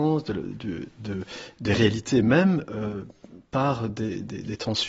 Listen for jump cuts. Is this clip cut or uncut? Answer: uncut